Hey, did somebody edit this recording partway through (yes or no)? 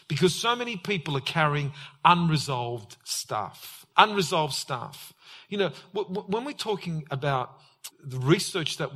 yes